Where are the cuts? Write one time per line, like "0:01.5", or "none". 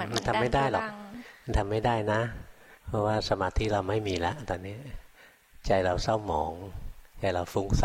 0:02.8